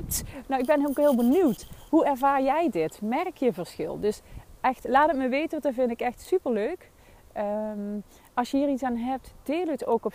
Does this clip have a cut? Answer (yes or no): no